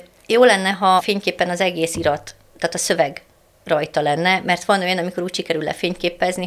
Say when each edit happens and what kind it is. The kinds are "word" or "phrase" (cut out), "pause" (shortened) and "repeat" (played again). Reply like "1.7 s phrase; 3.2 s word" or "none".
1.0 s word